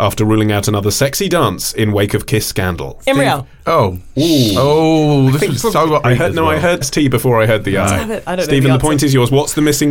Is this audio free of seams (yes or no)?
no